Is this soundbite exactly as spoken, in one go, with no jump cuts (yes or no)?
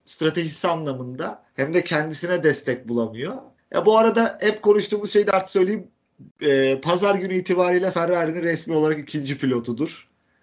no